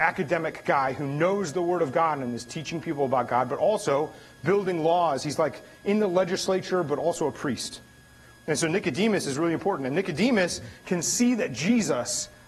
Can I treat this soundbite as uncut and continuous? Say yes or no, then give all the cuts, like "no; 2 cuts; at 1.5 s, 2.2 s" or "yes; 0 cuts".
yes; 0 cuts